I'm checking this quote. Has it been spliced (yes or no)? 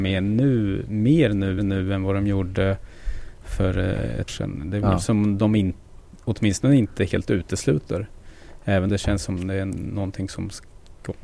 yes